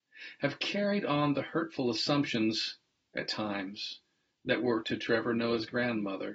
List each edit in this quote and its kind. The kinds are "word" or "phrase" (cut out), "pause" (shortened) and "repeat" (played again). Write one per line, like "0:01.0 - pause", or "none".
0:04.8 - word